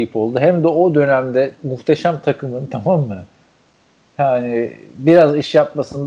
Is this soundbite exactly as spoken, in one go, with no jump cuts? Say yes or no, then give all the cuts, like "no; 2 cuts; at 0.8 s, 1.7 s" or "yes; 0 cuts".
yes; 0 cuts